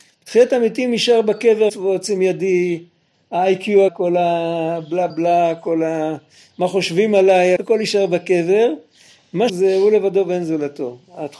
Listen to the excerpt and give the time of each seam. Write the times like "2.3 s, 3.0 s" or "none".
1.7 s, 3.9 s, 5.1 s, 7.6 s, 9.5 s